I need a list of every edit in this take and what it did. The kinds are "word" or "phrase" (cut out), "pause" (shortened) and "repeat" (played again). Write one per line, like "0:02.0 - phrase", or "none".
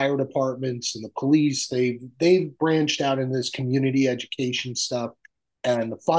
none